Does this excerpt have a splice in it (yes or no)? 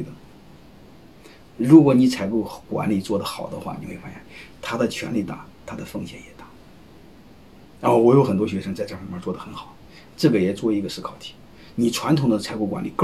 yes